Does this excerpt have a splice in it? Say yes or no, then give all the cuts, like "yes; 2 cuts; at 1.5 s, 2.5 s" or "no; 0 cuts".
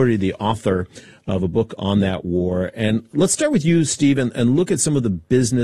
no; 0 cuts